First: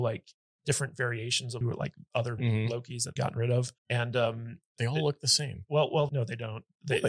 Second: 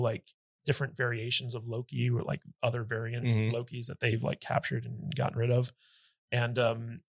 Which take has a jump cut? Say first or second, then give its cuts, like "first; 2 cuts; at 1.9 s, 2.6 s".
first; 5 cuts; at 1.6 s, 2.4 s, 3.2 s, 3.8 s, 6.1 s